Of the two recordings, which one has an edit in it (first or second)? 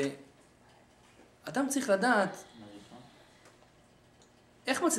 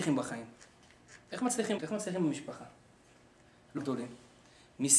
second